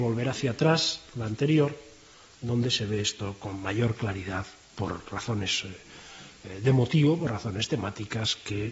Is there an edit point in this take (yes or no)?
no